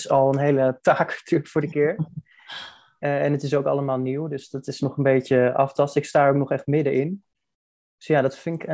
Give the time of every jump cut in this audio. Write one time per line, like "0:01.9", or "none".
0:01.6